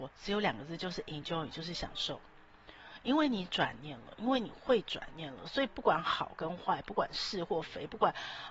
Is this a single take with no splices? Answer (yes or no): yes